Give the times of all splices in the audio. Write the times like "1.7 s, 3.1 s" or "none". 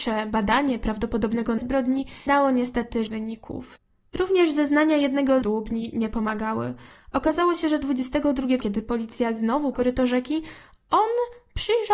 1.6 s, 2.3 s, 3.1 s, 5.4 s, 8.6 s, 9.7 s